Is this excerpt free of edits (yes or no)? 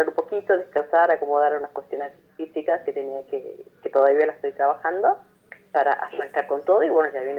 yes